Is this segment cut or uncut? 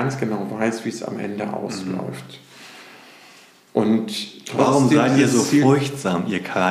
uncut